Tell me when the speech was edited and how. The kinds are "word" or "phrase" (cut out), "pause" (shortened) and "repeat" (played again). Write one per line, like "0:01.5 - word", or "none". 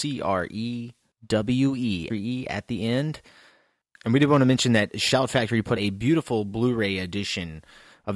0:02.1 - word
0:05.8 - word